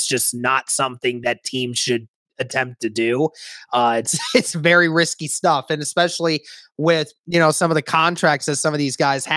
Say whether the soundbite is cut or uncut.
uncut